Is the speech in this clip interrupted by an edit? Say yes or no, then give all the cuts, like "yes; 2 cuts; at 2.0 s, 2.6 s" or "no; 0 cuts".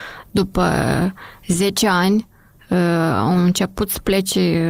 no; 0 cuts